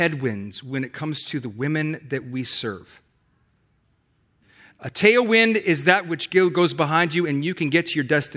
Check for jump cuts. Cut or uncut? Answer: uncut